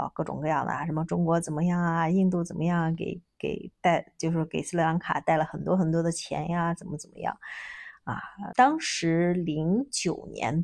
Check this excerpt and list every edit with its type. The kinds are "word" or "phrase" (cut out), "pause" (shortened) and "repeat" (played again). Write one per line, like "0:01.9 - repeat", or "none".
0:08.5 - word